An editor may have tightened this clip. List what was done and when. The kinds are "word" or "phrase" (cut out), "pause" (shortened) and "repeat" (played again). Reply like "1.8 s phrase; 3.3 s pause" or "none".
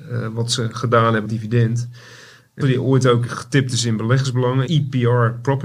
1.2 s word; 2.6 s word; 4.7 s word

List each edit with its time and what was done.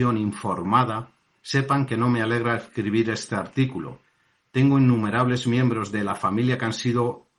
none

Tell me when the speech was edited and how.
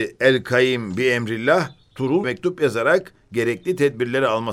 2.2 s word

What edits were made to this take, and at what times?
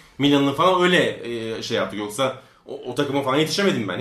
none

